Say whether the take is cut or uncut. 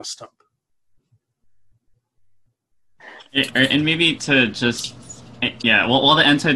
uncut